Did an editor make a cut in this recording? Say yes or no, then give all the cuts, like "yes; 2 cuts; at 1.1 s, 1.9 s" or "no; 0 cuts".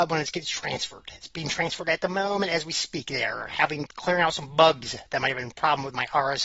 no; 0 cuts